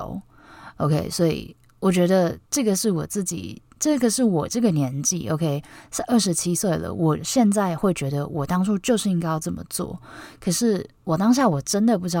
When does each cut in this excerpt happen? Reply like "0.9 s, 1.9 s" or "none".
2.5 s